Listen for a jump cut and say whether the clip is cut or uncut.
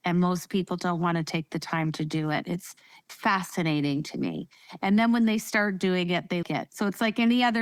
cut